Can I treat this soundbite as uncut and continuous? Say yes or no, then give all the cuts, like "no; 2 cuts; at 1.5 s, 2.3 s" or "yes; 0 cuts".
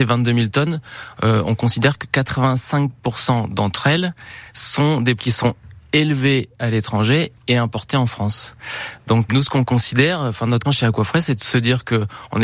no; 3 cuts; at 5.2 s, 9.3 s, 10.6 s